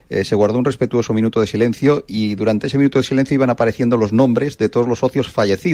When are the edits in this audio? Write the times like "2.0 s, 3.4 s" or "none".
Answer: none